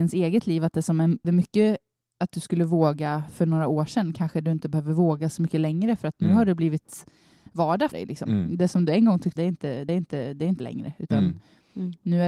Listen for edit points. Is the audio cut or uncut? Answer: cut